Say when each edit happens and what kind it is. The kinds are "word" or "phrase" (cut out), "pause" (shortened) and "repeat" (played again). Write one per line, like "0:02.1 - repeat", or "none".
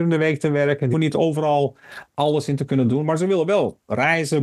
0:00.9 - word